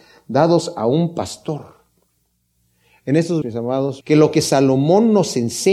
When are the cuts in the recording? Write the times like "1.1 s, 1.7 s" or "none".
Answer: 3.4 s, 4.0 s